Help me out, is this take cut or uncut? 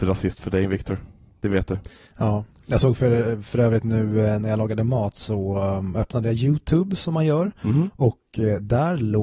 uncut